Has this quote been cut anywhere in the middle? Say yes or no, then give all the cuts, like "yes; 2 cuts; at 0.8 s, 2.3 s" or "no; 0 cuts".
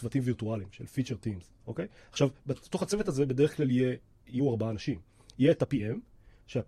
no; 0 cuts